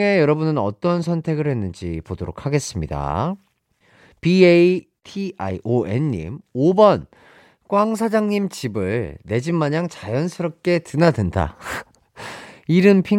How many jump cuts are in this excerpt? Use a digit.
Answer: 0